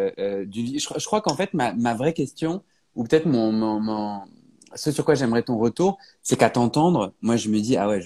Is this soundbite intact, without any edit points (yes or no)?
yes